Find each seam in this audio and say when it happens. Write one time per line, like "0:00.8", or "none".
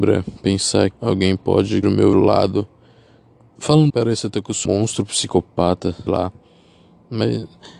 0:00.9
0:01.8
0:02.1
0:03.9
0:04.6
0:06.1